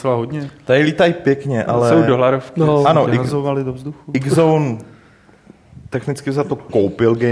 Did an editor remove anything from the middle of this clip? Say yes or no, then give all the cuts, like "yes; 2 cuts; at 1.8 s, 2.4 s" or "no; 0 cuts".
no; 0 cuts